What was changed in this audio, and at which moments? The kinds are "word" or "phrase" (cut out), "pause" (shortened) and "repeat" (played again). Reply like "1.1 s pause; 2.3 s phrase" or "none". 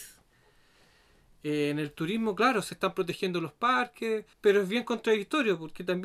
4.3 s pause